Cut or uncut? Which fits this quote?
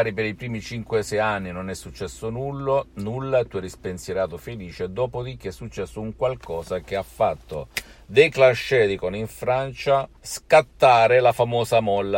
cut